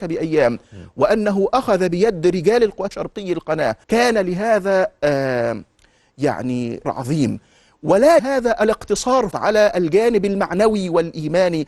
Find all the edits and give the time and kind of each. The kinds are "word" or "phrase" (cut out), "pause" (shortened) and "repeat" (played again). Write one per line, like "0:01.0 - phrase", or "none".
0:02.9 - phrase
0:03.8 - pause
0:06.8 - word
0:08.2 - word
0:09.3 - word